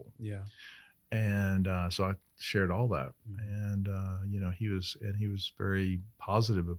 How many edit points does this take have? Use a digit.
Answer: 0